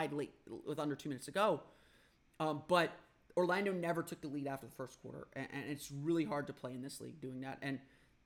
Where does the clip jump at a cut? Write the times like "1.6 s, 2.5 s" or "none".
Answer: none